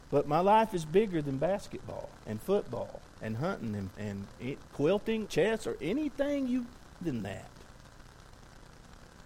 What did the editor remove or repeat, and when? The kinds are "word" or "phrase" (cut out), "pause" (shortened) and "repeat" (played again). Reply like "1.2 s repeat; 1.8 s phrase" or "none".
2.2 s pause; 3.1 s pause; 3.9 s word; 5.3 s word; 7.0 s phrase